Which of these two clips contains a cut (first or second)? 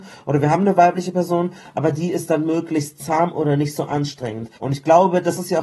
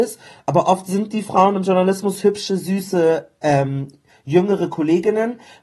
first